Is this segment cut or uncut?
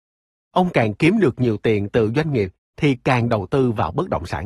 uncut